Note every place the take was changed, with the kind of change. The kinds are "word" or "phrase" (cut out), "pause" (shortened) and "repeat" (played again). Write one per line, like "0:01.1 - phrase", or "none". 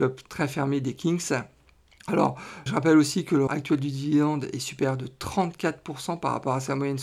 0:02.7 - word
0:03.5 - word